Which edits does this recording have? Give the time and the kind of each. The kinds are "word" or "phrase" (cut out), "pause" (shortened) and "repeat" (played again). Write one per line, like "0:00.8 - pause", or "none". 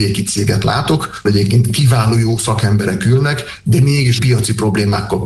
0:01.2 - word
0:04.2 - word